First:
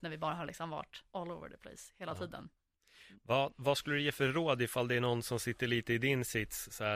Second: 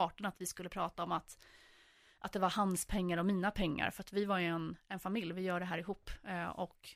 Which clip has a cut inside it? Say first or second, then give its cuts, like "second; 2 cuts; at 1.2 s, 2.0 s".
first; 1 cut; at 1.1 s